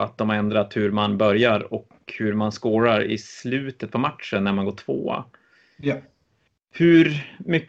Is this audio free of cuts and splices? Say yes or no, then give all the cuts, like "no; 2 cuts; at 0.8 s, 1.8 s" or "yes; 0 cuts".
yes; 0 cuts